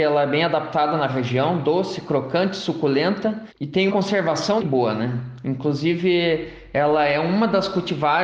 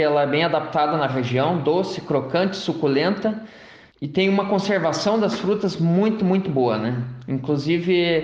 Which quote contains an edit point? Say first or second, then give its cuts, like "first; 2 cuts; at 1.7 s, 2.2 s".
first; 3 cuts; at 3.5 s, 3.9 s, 4.6 s